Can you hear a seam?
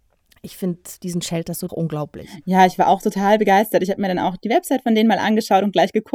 yes; 1 cut; at 1.7 s

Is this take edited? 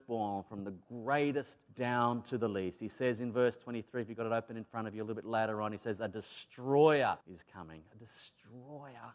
yes; 2 cuts; at 1.7 s, 7.2 s

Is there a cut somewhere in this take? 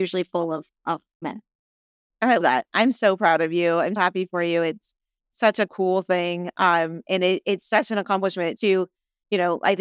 yes; 5 cuts; at 1.2 s, 2.4 s, 4.0 s, 5.7 s, 8.6 s

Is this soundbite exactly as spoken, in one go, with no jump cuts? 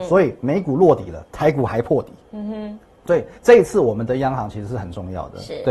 no; 2 cuts; at 1.3 s, 3.4 s

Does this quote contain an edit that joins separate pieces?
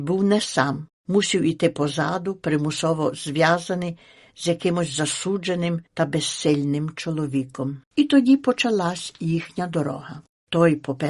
yes; 2 cuts; at 5.9 s, 7.8 s

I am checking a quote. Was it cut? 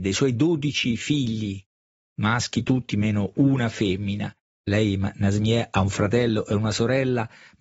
no; 0 cuts

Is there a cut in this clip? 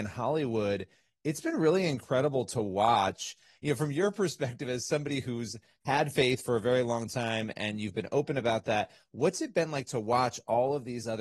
no; 0 cuts

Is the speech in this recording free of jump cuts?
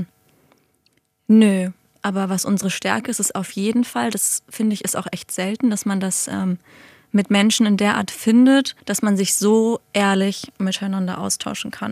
no; 1 cut; at 8.8 s

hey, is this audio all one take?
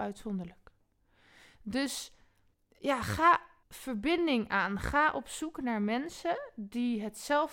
no; 2 cuts; at 2.5 s, 3.6 s

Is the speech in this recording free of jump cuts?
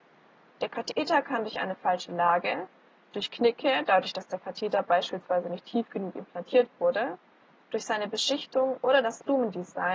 yes; 0 cuts

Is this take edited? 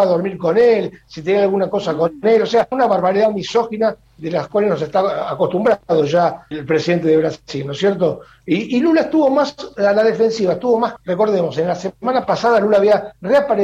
yes; 3 cuts; at 2.7 s, 6.5 s, 11.0 s

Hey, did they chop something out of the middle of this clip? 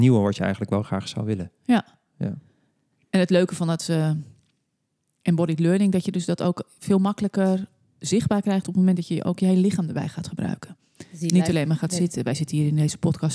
no; 0 cuts

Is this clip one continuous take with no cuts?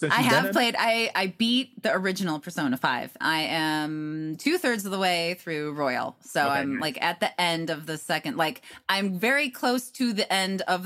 no; 1 cut; at 3.2 s

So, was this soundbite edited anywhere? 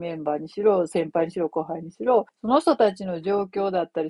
yes; 1 cut; at 2.3 s

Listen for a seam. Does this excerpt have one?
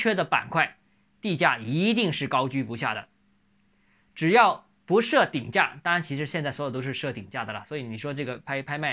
no; 0 cuts

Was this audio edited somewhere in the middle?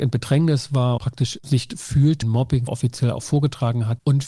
yes; 4 cuts; at 1.0 s, 1.7 s, 2.2 s, 2.7 s

